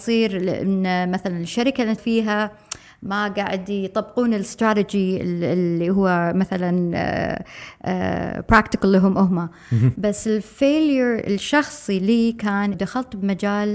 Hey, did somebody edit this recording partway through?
yes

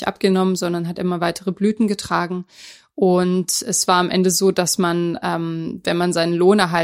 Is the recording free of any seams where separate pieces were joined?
yes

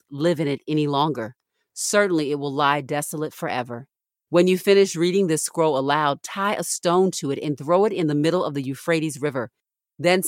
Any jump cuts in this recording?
no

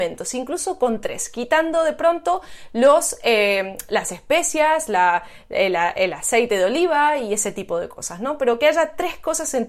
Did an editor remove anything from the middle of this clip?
no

